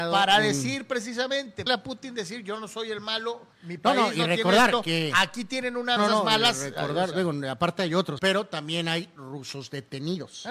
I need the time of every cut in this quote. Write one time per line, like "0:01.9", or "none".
0:01.7
0:03.5
0:06.0
0:08.2

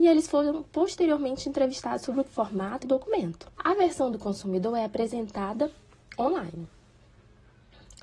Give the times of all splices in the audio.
0:02.2
0:02.8
0:03.5

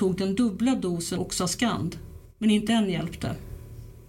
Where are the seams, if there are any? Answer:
0:01.2
0:02.7

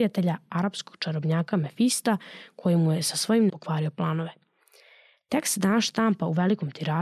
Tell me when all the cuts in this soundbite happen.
0:03.5

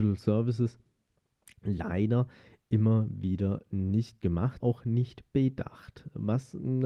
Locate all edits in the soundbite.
0:04.6

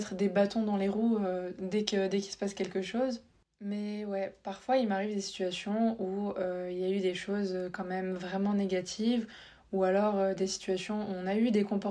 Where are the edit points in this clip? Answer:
none

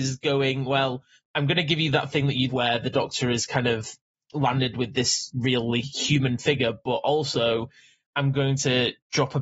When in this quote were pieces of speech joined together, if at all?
0:02.5

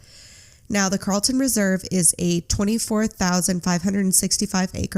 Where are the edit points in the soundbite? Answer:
none

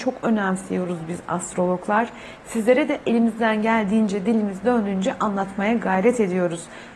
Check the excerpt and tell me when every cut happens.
none

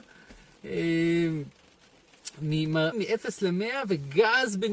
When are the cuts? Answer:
0:02.9

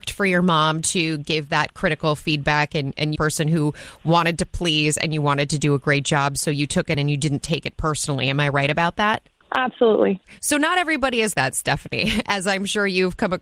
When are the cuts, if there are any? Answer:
0:03.2
0:06.9
0:11.3

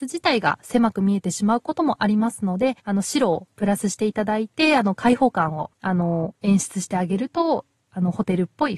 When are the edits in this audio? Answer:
0:02.8
0:05.7

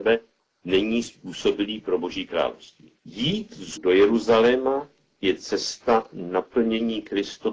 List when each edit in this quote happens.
0:03.0
0:03.8

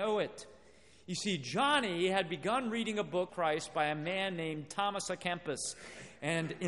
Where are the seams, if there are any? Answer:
0:03.3

